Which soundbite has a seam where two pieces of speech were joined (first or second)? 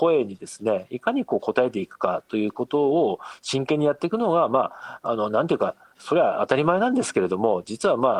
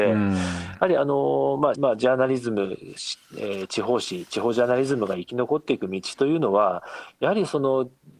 second